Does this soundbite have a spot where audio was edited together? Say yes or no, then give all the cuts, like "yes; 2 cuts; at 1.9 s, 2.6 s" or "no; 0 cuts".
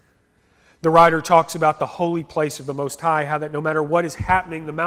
no; 0 cuts